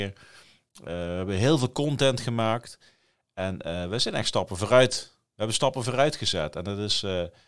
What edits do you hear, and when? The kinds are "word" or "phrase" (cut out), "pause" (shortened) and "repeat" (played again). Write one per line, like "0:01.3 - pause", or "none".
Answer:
none